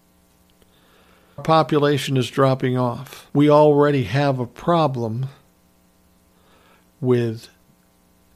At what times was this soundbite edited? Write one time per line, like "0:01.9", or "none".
0:01.4
0:03.3